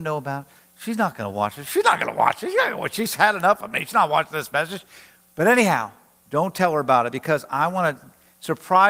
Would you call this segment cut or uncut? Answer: uncut